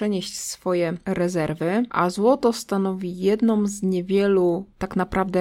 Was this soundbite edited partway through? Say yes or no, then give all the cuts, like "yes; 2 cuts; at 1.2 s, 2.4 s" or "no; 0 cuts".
no; 0 cuts